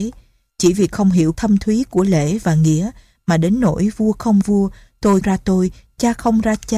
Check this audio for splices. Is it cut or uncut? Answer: cut